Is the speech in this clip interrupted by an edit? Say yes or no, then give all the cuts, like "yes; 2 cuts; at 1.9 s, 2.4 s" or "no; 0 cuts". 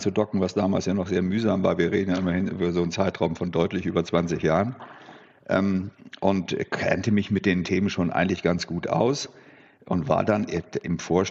no; 0 cuts